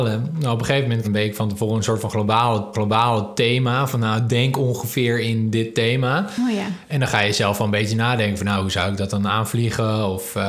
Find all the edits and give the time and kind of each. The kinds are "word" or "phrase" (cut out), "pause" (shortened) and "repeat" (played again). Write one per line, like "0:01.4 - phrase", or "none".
0:01.0 - phrase
0:02.7 - repeat